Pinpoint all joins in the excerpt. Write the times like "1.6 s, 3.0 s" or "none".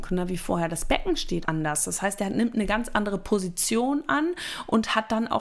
1.4 s